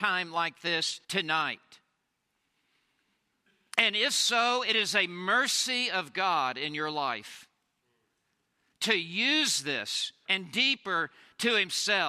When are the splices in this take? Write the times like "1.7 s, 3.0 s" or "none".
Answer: 1.0 s, 10.3 s